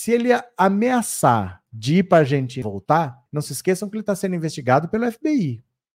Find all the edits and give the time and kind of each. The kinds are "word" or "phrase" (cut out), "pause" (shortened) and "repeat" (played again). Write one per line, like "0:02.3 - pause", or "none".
0:02.6 - phrase
0:03.3 - pause